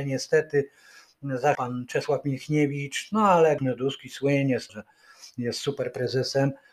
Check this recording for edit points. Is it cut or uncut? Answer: cut